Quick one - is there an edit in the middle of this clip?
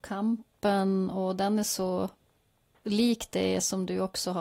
no; 0 cuts

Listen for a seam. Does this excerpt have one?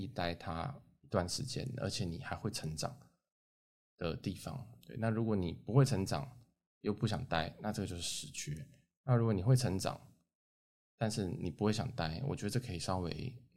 no; 0 cuts

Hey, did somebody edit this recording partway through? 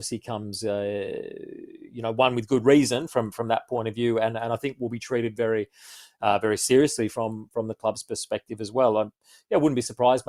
no; 0 cuts

